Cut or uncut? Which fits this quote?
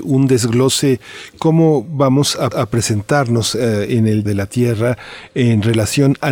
cut